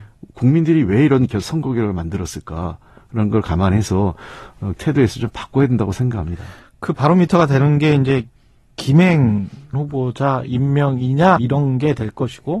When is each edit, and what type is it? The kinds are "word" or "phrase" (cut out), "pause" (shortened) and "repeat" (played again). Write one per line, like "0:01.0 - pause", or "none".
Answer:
0:04.8 - word
0:09.7 - word
0:11.4 - word